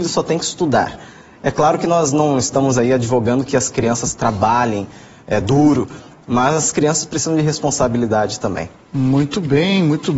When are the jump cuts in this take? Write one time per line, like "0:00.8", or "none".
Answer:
none